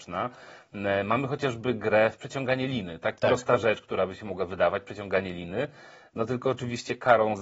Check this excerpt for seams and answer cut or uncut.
uncut